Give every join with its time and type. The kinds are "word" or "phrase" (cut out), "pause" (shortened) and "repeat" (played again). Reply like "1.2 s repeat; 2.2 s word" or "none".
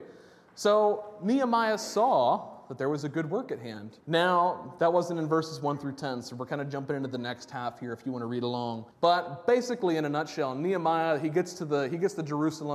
4.0 s pause; 8.9 s pause